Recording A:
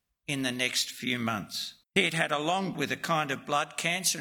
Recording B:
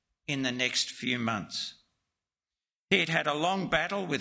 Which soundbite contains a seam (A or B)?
A